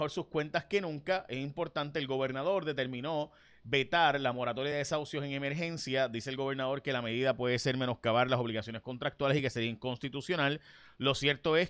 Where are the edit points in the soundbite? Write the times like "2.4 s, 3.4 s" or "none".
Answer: none